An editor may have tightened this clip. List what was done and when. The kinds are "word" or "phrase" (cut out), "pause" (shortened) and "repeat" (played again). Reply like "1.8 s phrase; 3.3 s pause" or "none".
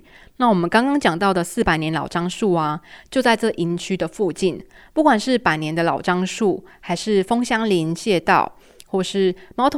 none